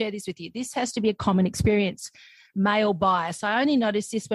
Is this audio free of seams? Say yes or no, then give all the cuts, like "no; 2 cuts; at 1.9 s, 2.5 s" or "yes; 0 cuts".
yes; 0 cuts